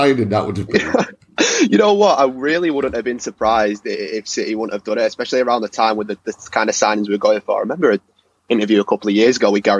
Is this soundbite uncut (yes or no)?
yes